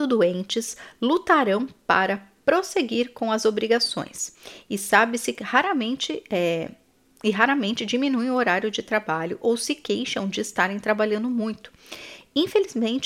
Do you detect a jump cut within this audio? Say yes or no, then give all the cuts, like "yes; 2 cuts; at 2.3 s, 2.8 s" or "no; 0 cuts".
no; 0 cuts